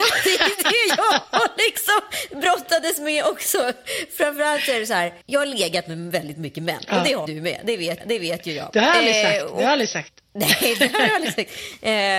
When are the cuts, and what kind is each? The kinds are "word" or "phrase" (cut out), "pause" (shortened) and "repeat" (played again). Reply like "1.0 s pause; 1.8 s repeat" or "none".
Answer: 5.2 s pause; 7.3 s word; 8.0 s repeat